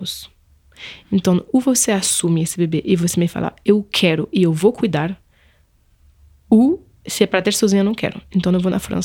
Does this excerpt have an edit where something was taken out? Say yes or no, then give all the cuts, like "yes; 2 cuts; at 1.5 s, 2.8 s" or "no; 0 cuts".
yes; 1 cut; at 7.0 s